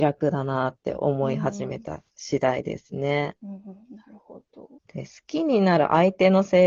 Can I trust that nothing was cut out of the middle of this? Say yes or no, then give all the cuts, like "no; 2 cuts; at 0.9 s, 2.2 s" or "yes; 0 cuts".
no; 1 cut; at 4.8 s